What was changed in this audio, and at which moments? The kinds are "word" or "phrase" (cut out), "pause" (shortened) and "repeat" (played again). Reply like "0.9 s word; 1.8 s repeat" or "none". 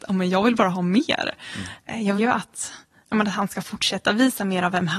2.2 s word; 3.0 s word

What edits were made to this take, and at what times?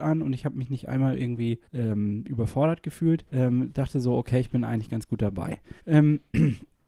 1.6 s pause; 3.3 s pause; 5.8 s pause

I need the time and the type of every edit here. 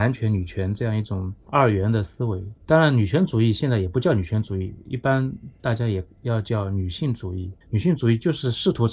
2.6 s pause; 7.6 s pause

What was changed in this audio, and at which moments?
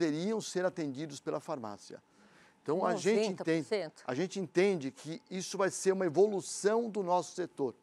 none

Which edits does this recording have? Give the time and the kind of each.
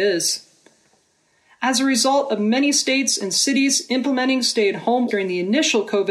5.1 s word

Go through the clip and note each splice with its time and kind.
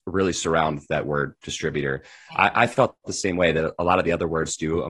none

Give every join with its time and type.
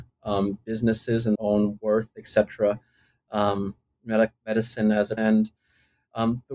1.3 s word; 5.2 s word

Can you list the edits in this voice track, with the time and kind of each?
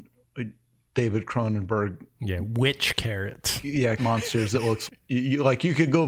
4.0 s word; 4.9 s word

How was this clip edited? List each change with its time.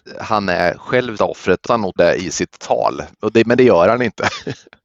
1.2 s word; 1.6 s word; 2.0 s word

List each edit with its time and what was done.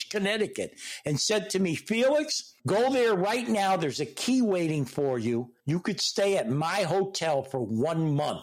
2.6 s pause; 5.6 s pause

